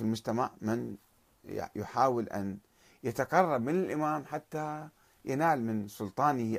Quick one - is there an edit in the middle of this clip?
no; 0 cuts

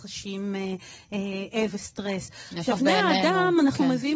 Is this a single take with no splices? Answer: no; 2 cuts; at 1.7 s, 2.8 s

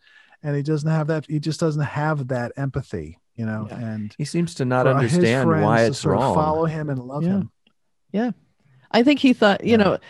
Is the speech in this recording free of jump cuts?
yes; 0 cuts

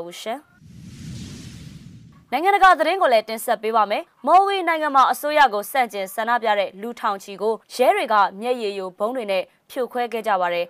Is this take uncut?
no; 2 cuts; at 4.1 s, 7.6 s

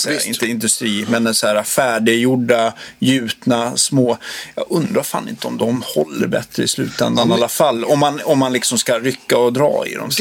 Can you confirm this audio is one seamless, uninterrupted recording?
yes; 0 cuts

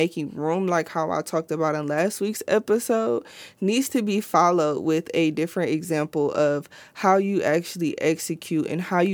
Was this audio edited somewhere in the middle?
no; 0 cuts

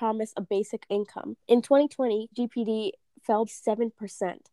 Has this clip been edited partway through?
yes; 3 cuts; at 1.4 s, 2.3 s, 3.5 s

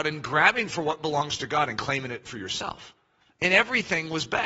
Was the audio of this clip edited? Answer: no; 0 cuts

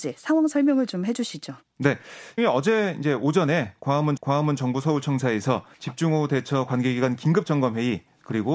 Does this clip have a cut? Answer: yes; 3 cuts; at 2.4 s, 4.2 s, 5.7 s

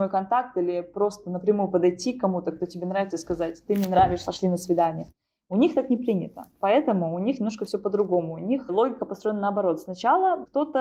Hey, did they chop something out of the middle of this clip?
no; 0 cuts

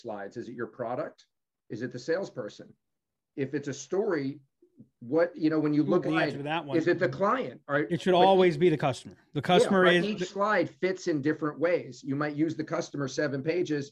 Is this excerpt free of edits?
no; 1 cut; at 6.0 s

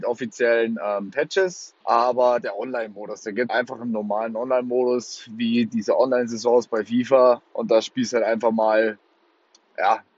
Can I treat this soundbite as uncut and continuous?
no; 2 cuts; at 1.8 s, 3.5 s

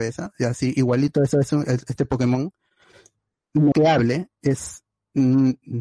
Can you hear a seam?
yes; 2 cuts; at 1.3 s, 3.7 s

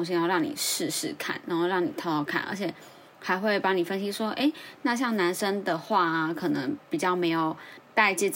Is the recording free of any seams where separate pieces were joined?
no; 1 cut; at 3.1 s

